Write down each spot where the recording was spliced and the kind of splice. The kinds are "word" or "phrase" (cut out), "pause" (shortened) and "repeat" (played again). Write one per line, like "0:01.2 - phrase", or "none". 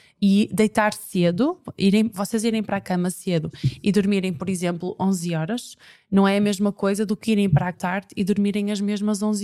0:07.7 - word

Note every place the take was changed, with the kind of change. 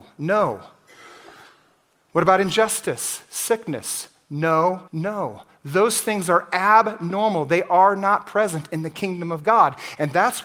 0:04.9 - pause

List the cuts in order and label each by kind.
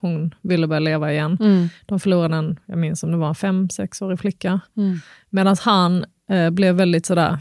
none

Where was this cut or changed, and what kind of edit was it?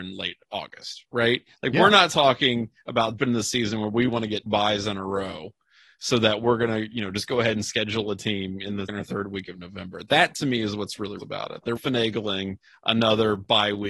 0:03.2 - word
0:04.1 - word
0:04.5 - word
0:08.9 - word
0:11.2 - word
0:11.8 - word

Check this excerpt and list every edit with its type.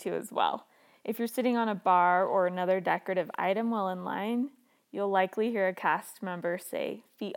none

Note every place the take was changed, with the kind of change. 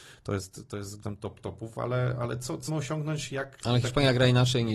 0:01.0 - phrase
0:02.7 - phrase

